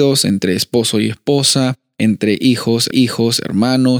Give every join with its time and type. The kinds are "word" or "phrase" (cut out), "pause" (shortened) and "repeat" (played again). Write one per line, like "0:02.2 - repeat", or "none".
0:02.9 - repeat